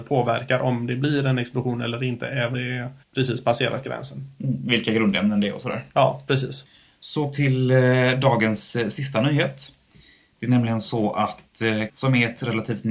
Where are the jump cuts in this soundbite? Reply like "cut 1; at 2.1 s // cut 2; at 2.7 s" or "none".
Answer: cut 1; at 2.5 s // cut 2; at 3.0 s // cut 3; at 5.9 s // cut 4; at 11.9 s